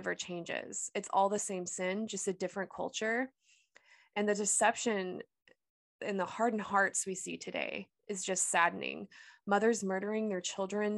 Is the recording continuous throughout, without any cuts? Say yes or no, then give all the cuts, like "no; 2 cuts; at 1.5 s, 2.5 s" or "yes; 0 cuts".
yes; 0 cuts